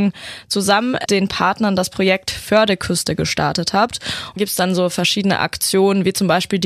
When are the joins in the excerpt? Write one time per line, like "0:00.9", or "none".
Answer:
0:01.1
0:04.4